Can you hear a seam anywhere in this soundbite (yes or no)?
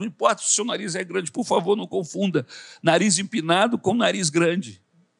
no